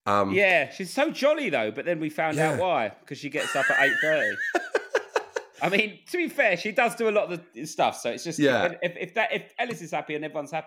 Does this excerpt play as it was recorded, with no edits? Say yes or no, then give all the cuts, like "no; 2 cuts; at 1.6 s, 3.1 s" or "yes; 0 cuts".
yes; 0 cuts